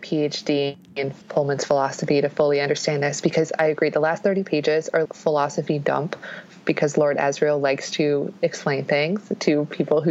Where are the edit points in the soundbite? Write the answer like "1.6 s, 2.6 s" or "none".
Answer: 1.2 s, 5.0 s